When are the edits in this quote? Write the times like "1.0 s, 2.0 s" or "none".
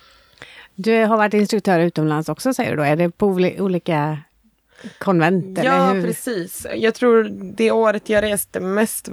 none